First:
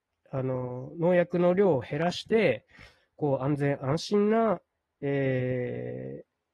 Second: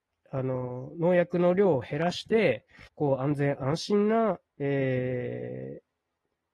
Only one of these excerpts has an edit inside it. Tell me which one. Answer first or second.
second